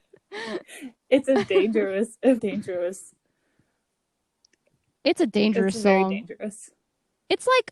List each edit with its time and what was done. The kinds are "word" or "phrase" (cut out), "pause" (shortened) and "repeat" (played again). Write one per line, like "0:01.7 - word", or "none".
0:02.4 - word